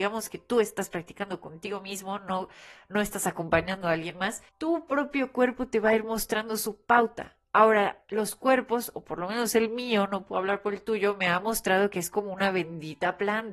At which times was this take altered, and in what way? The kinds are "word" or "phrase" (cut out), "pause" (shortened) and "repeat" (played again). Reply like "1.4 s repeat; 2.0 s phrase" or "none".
4.5 s pause; 7.4 s pause